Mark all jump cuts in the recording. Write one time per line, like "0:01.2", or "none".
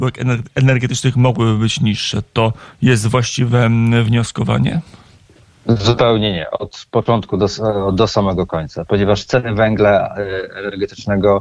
none